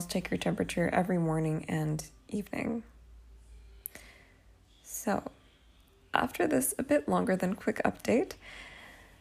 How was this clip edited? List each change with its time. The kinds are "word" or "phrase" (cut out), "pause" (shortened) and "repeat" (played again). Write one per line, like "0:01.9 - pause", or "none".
none